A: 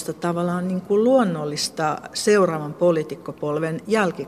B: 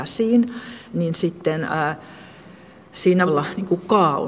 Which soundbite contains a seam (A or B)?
B